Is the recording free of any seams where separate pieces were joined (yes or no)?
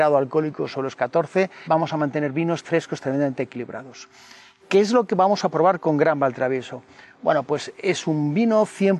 no